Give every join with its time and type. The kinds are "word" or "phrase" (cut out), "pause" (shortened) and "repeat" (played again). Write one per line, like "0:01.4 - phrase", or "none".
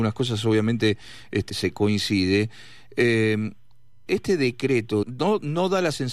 0:01.5 - word
0:04.1 - word
0:05.0 - word